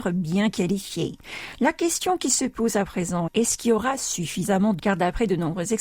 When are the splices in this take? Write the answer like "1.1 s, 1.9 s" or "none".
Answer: 3.3 s, 4.8 s